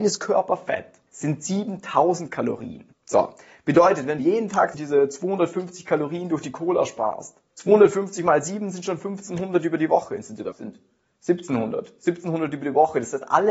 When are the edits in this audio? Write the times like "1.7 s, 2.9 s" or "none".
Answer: 1.1 s, 2.9 s, 4.2 s, 4.7 s, 7.5 s, 10.5 s